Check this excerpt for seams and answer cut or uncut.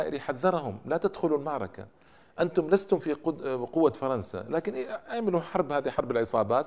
uncut